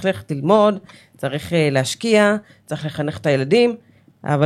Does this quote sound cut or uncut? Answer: uncut